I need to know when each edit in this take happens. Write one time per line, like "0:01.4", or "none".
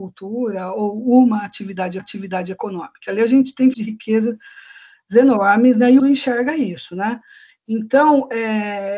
0:02.0
0:03.7
0:06.0